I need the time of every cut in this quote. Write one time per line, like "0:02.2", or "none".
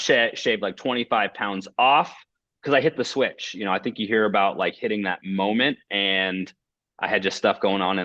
none